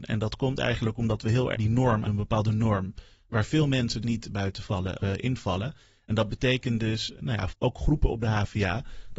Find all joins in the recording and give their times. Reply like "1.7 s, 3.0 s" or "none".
1.5 s, 2.0 s, 4.0 s, 5.0 s, 7.2 s, 7.5 s

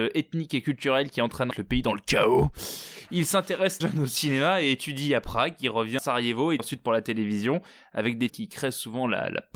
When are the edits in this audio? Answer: 1.5 s, 3.8 s, 6.0 s, 6.6 s, 8.3 s

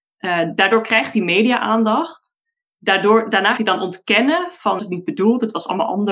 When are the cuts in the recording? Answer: 3.6 s, 4.8 s

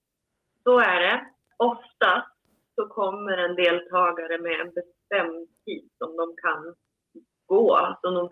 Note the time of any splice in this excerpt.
none

